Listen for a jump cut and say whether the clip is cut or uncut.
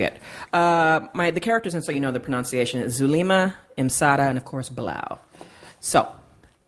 uncut